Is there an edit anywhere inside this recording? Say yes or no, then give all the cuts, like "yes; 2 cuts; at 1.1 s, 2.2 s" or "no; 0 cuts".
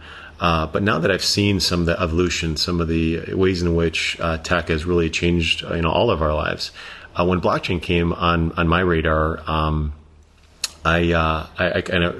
no; 0 cuts